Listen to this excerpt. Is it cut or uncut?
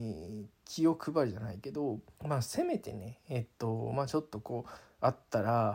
cut